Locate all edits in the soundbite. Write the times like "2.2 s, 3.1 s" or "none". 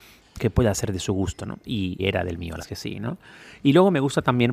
2.0 s, 2.6 s